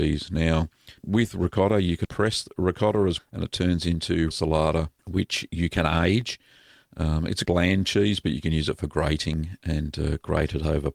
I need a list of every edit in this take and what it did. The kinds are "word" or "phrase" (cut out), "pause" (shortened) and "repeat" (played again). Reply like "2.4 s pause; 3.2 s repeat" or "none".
1.0 s pause; 2.0 s word; 3.2 s word; 4.3 s word; 5.0 s pause; 7.5 s word